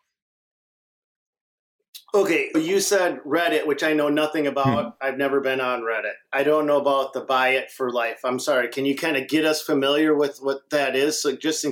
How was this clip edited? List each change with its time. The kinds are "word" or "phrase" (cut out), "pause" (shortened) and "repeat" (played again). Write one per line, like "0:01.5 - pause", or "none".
0:02.5 - word